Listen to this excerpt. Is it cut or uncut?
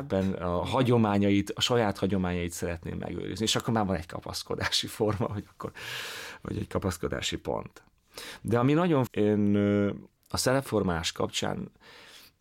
cut